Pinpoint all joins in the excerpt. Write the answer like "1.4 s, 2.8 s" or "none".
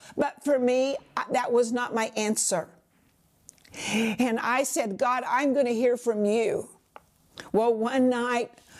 none